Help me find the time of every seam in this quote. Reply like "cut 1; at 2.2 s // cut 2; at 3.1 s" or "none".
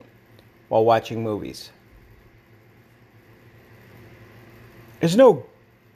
none